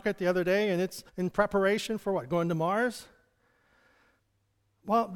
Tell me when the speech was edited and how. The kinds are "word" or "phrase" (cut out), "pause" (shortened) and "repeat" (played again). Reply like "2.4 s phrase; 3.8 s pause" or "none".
1.1 s pause